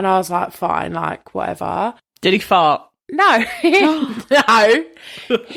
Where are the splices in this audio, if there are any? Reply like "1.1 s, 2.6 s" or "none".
none